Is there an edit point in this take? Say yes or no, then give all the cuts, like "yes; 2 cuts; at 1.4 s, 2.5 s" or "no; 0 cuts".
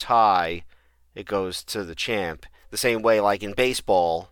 no; 0 cuts